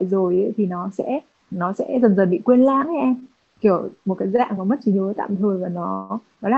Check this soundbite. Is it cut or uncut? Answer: uncut